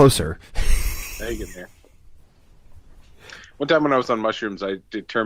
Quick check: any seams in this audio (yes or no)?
no